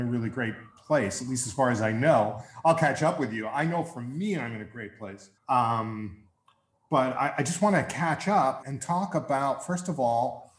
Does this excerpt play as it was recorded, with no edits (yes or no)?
no